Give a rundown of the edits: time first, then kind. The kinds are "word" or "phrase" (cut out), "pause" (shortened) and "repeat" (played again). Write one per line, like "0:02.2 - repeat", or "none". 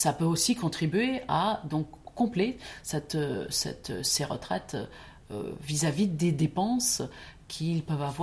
none